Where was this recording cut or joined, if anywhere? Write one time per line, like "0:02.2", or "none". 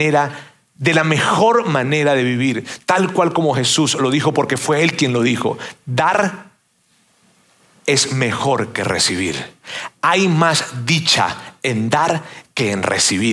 none